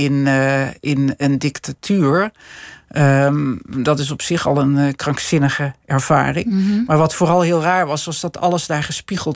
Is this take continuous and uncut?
yes; 0 cuts

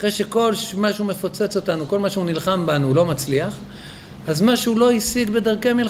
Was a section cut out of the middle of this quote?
no; 0 cuts

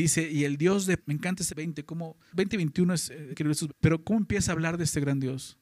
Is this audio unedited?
no; 6 cuts; at 1.0 s, 1.5 s, 2.3 s, 3.3 s, 3.7 s, 4.0 s

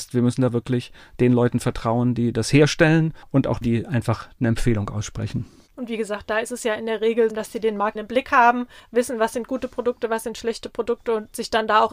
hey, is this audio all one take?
no; 3 cuts; at 3.6 s, 7.3 s, 8.0 s

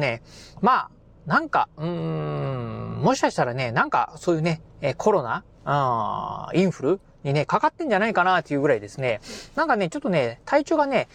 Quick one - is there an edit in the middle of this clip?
no; 0 cuts

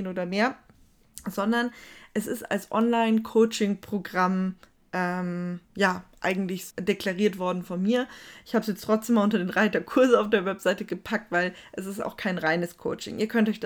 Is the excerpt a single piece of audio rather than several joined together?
no; 2 cuts; at 5.7 s, 6.7 s

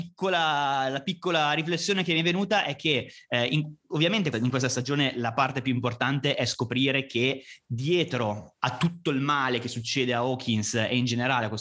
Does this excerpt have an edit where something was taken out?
yes; 1 cut; at 4.3 s

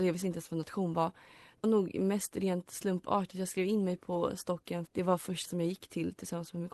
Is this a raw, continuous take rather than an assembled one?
no; 3 cuts; at 1.6 s, 4.9 s, 5.5 s

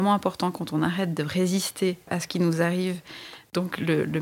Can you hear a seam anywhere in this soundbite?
no; 0 cuts

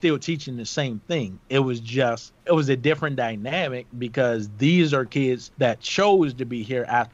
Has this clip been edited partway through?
yes; 2 cuts; at 2.4 s, 5.5 s

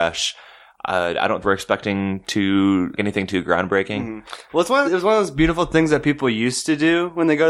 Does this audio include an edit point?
yes; 3 cuts; at 1.4 s, 3.0 s, 4.8 s

